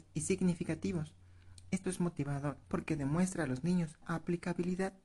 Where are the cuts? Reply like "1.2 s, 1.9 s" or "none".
1.8 s, 2.6 s, 4.0 s